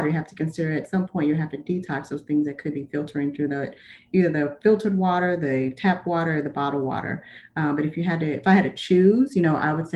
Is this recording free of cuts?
yes; 0 cuts

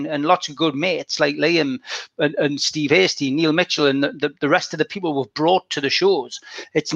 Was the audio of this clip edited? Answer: no; 0 cuts

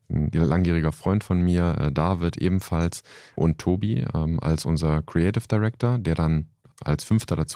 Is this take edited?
no; 0 cuts

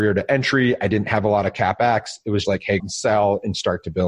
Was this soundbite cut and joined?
yes; 2 cuts; at 2.4 s, 2.8 s

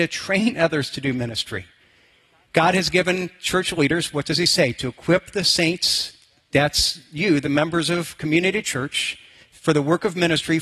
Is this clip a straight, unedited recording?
yes; 0 cuts

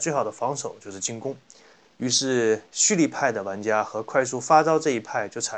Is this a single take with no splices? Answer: yes; 0 cuts

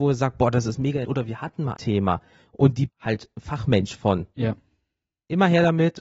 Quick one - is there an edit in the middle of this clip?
yes; 3 cuts; at 1.0 s, 1.8 s, 2.9 s

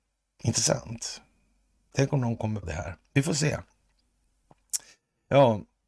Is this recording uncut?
no; 1 cut; at 2.6 s

